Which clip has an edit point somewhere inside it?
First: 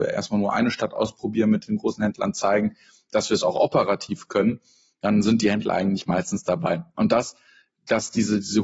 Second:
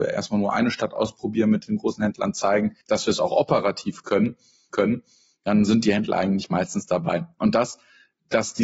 second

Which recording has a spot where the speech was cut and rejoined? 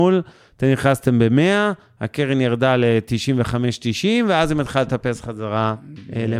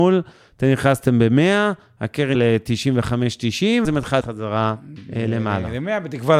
second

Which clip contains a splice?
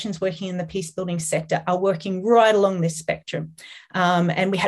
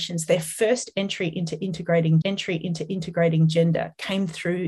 second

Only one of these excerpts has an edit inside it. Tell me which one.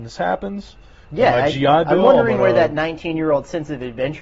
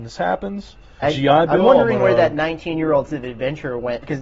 second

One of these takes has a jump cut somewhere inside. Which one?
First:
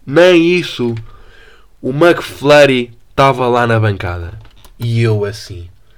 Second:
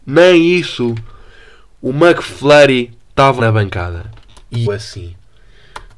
second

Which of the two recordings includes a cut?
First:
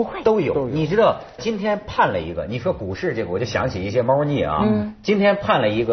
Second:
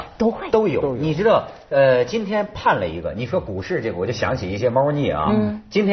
first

